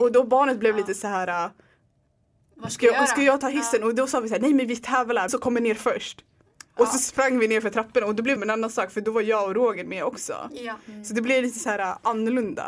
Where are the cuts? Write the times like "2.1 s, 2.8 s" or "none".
5.3 s, 8.4 s